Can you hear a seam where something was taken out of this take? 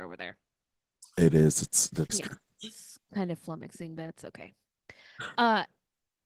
yes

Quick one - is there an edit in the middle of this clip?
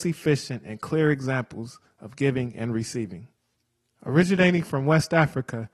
no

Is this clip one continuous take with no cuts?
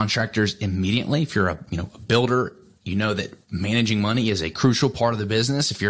yes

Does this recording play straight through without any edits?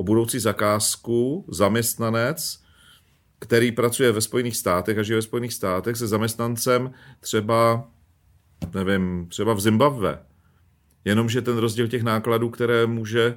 yes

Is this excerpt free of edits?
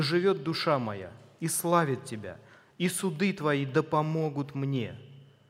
yes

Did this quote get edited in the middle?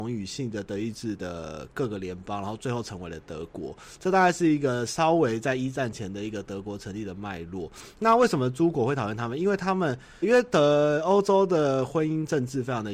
yes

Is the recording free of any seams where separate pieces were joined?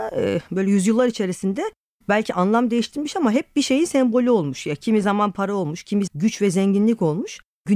no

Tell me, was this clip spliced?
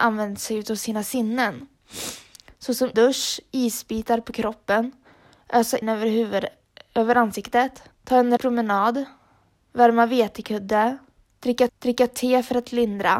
yes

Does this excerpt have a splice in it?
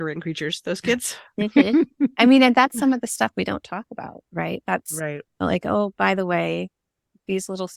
yes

